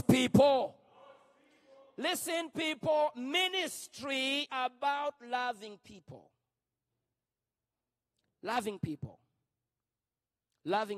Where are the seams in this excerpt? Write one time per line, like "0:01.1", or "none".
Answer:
0:04.5